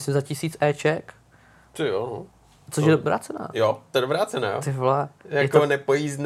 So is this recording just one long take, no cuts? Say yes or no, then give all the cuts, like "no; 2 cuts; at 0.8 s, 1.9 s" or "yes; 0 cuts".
no; 1 cut; at 3.9 s